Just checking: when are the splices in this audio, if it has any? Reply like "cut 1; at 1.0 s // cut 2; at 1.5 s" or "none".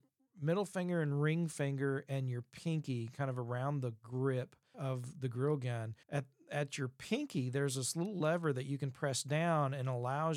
cut 1; at 4.7 s // cut 2; at 6.0 s